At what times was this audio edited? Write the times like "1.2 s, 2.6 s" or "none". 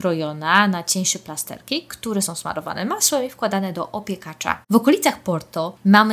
4.6 s